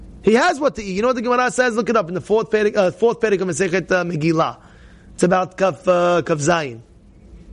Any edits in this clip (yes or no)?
no